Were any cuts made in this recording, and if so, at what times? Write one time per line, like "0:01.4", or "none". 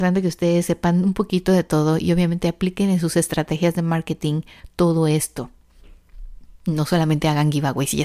none